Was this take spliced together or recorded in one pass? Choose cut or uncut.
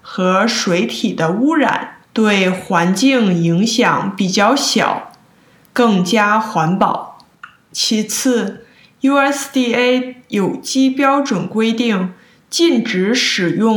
cut